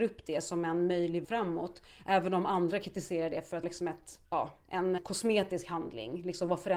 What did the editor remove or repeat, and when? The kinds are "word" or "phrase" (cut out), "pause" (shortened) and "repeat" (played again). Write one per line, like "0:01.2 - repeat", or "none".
0:01.2 - word
0:03.6 - word
0:04.2 - pause
0:05.0 - word